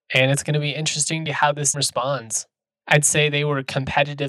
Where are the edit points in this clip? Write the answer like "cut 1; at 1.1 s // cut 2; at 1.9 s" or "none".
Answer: cut 1; at 1.3 s // cut 2; at 1.7 s // cut 3; at 2.7 s